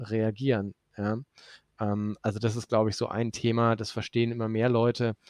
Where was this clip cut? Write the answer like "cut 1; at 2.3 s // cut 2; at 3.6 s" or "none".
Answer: none

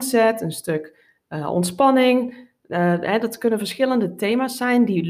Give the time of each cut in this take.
none

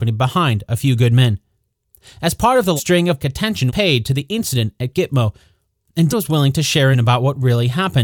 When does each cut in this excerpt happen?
cut 1; at 2.8 s // cut 2; at 3.2 s // cut 3; at 3.7 s // cut 4; at 6.1 s // cut 5; at 6.9 s

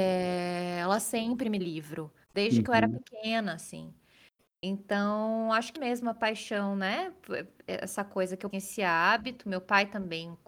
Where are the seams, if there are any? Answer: cut 1; at 1.6 s // cut 2; at 2.2 s // cut 3; at 5.8 s // cut 4; at 8.5 s

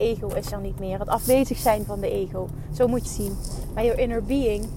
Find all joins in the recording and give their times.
cut 1; at 3.1 s

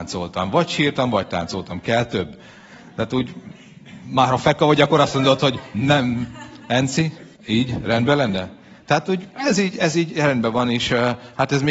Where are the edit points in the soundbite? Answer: cut 1; at 7.4 s

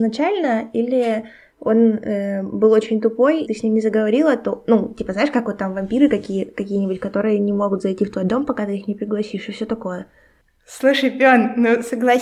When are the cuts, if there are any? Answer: cut 1; at 3.4 s

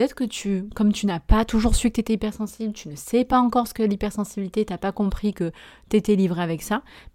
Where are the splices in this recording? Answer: none

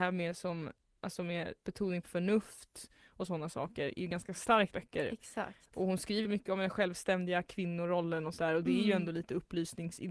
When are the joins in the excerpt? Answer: cut 1; at 1.6 s // cut 2; at 2.0 s // cut 3; at 4.7 s // cut 4; at 6.2 s // cut 5; at 8.4 s

